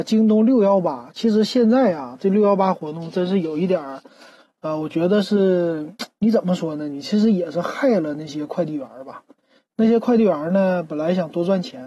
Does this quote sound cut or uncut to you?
cut